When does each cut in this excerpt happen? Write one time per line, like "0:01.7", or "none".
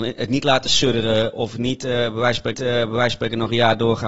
0:02.5